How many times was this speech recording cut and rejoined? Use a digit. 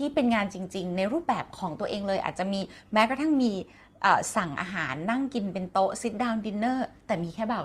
0